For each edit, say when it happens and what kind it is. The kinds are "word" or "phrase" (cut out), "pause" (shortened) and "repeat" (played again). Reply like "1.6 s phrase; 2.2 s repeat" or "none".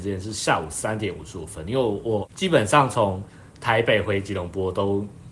3.5 s pause